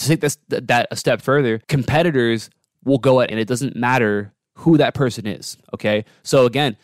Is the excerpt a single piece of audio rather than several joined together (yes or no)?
no